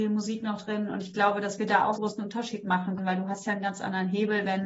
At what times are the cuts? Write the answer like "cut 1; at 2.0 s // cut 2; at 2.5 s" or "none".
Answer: cut 1; at 2.0 s // cut 2; at 3.0 s